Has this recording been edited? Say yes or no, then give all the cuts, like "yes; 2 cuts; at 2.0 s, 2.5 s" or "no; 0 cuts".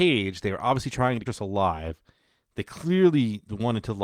yes; 1 cut; at 1.3 s